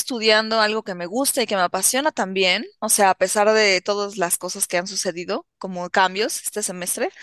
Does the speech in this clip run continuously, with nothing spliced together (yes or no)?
yes